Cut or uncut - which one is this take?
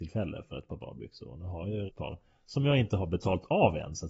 cut